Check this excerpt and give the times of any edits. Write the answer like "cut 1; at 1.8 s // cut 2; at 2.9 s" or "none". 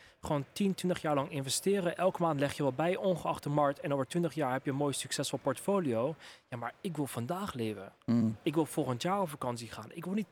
none